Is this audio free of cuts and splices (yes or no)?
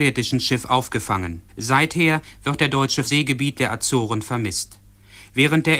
no